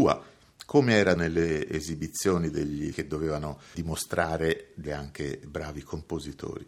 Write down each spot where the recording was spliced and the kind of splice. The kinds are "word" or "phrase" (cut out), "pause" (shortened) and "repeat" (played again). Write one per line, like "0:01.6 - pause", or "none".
0:01.2 - word
0:02.9 - word
0:03.7 - word
0:04.9 - word